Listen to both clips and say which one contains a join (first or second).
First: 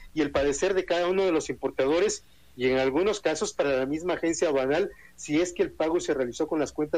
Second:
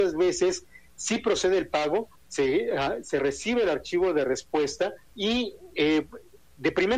second